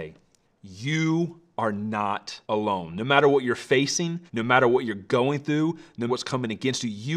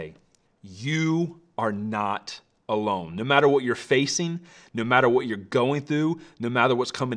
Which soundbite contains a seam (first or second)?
first